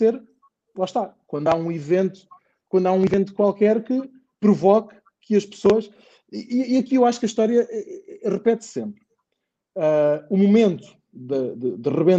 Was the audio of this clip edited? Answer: no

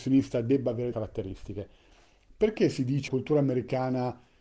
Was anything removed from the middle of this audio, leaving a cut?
yes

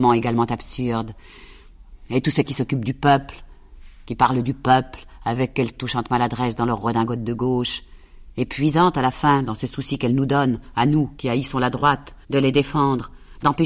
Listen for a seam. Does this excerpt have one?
yes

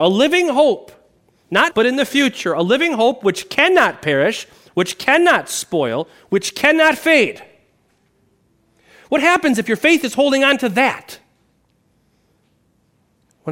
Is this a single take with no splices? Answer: no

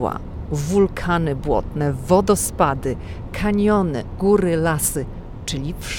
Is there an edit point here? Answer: yes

